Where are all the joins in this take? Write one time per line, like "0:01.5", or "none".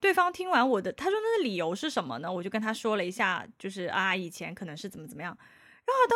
none